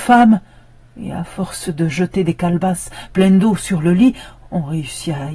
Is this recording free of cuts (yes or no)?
yes